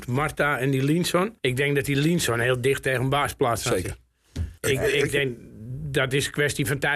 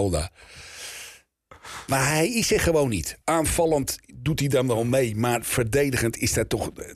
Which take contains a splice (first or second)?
first